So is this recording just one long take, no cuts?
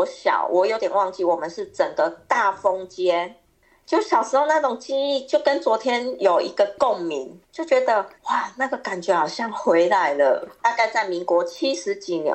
no; 2 cuts; at 7.4 s, 8.1 s

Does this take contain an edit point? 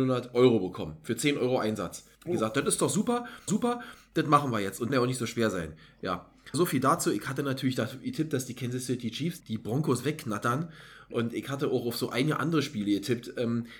yes; 5 cuts; at 2.1 s, 3.5 s, 4.9 s, 6.5 s, 9.4 s

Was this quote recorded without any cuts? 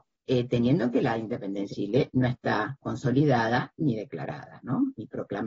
no; 3 cuts; at 0.9 s, 1.7 s, 2.8 s

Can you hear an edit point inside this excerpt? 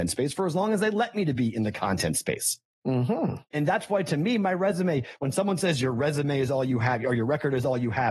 no; 0 cuts

